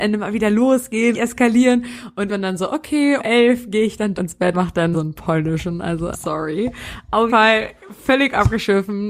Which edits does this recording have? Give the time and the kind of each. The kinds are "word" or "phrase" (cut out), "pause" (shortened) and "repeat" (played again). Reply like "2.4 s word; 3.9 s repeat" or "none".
1.1 s word; 2.3 s word; 3.2 s word; 4.2 s word; 4.5 s word; 4.9 s word; 6.1 s word; 7.3 s word